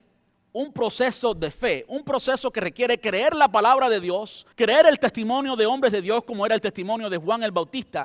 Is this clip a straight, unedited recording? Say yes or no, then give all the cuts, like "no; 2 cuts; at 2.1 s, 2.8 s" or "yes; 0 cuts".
no; 1 cut; at 4.5 s